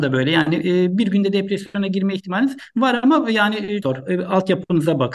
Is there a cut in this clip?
yes; 1 cut; at 3.8 s

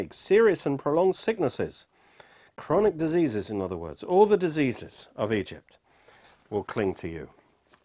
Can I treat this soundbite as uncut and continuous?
yes; 0 cuts

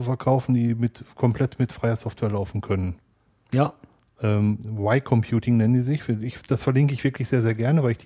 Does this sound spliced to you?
no; 0 cuts

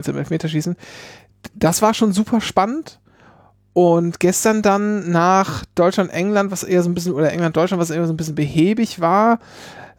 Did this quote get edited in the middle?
no; 0 cuts

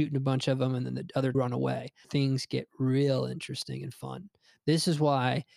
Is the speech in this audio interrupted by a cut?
yes; 2 cuts; at 1.3 s, 2.0 s

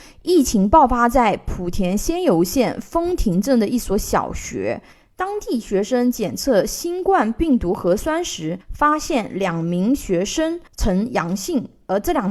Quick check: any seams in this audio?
yes; 2 cuts; at 8.6 s, 10.7 s

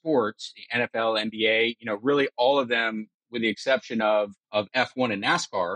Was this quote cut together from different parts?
yes; 1 cut; at 4.4 s

